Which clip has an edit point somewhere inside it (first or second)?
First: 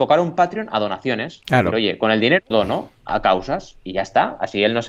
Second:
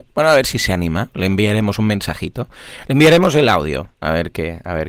first